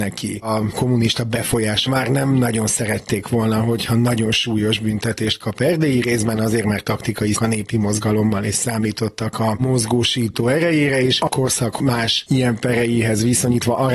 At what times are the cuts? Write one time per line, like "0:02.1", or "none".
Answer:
0:01.9
0:07.3